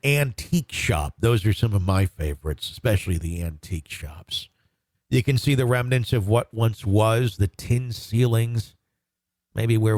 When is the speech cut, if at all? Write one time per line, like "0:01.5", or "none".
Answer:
none